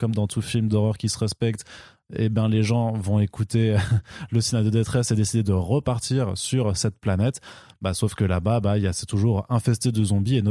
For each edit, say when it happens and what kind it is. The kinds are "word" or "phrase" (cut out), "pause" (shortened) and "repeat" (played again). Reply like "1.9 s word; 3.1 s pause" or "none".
none